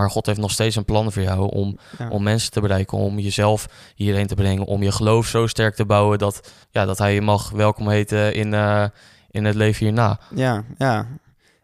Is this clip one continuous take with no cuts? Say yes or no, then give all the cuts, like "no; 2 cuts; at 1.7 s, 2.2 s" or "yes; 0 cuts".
no; 1 cut; at 6.6 s